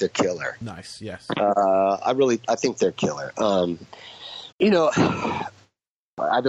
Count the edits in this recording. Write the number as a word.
one